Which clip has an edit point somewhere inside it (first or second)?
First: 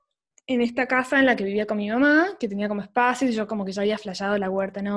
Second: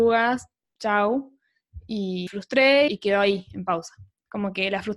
second